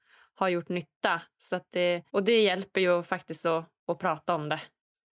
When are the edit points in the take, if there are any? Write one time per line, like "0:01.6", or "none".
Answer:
0:02.1

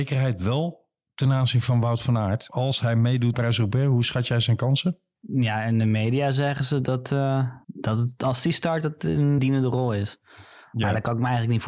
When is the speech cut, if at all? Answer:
0:03.3
0:07.6
0:09.4

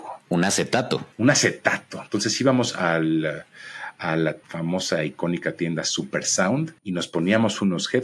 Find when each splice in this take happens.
0:01.1
0:04.4
0:06.8

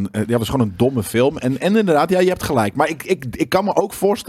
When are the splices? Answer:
none

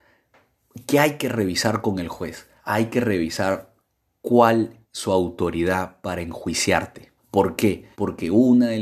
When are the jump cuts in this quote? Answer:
0:02.6
0:04.8
0:07.2
0:07.9

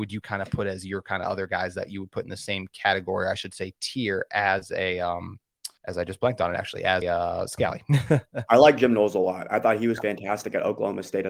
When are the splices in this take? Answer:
0:05.8
0:07.0

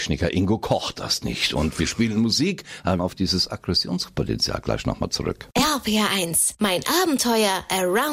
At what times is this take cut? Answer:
0:03.0

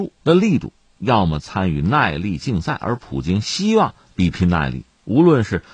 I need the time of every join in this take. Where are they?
none

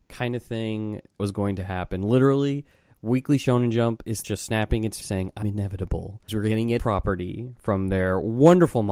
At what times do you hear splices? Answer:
0:01.2
0:04.2
0:05.0
0:05.4
0:06.3
0:06.8

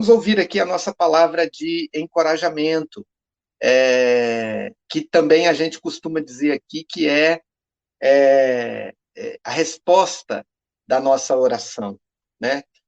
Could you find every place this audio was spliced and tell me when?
0:04.8
0:09.1

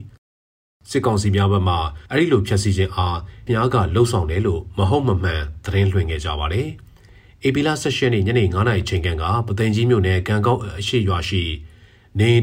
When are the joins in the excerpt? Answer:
0:02.1
0:03.5

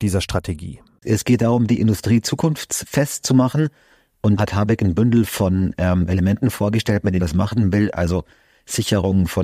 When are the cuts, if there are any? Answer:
0:04.4
0:07.2

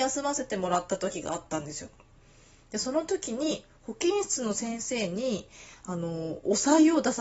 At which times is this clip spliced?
none

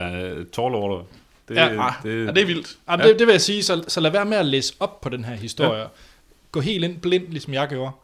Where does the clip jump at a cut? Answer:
none

